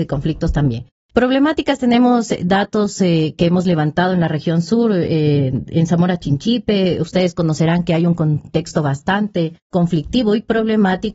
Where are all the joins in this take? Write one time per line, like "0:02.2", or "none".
0:09.6